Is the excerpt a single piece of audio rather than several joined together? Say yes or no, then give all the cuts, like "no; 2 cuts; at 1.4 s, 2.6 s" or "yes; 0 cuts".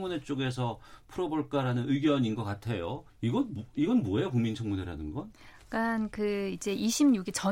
no; 1 cut; at 3.1 s